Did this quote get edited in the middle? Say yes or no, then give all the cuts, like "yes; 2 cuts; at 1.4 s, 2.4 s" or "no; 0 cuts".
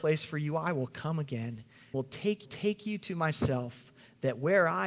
yes; 2 cuts; at 1.9 s, 2.4 s